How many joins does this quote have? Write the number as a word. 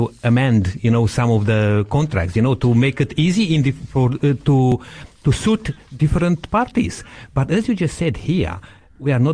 zero